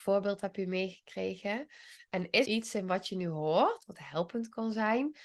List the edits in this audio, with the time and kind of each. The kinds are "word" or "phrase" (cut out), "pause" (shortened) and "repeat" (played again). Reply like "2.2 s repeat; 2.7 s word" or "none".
2.5 s word